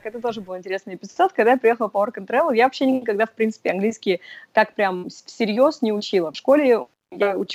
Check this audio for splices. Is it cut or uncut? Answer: uncut